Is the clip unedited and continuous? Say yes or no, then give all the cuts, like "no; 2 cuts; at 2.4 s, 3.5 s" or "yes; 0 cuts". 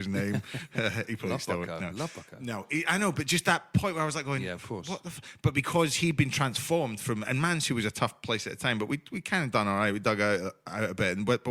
yes; 0 cuts